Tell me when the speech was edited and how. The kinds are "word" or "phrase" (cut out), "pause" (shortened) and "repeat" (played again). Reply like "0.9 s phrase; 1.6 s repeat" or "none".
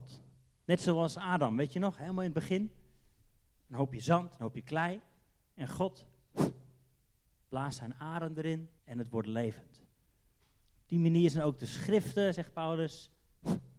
8.8 s pause